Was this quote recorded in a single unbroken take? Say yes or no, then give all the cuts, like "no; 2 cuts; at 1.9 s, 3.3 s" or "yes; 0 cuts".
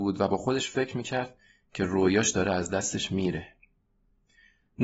yes; 0 cuts